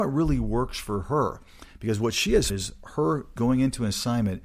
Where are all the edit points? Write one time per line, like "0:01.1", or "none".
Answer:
0:02.5
0:03.4